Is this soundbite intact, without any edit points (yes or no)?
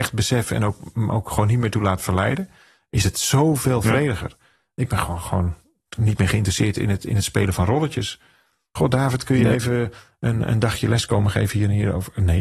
yes